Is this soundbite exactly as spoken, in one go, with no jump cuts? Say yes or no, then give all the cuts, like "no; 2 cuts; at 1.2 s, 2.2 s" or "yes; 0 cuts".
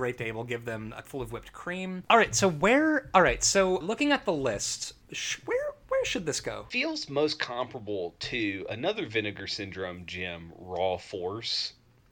no; 3 cuts; at 1.0 s, 3.8 s, 5.0 s